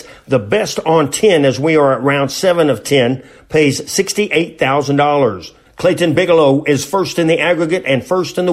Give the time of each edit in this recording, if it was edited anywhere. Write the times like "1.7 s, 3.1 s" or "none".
none